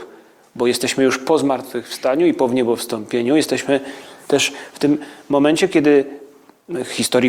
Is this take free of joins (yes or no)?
yes